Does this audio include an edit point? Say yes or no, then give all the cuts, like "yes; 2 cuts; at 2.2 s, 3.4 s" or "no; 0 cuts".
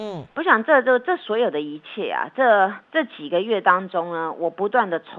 yes; 1 cut; at 2.8 s